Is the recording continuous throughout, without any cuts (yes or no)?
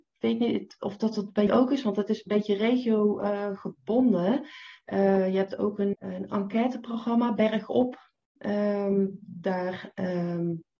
no